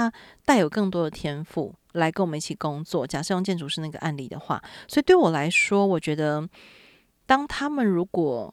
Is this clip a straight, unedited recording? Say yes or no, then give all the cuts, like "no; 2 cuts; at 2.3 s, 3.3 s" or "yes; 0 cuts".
yes; 0 cuts